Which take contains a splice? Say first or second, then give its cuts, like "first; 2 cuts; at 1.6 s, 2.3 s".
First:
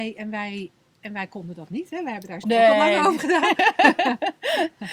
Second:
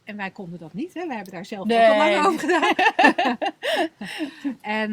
first; 1 cut; at 2.4 s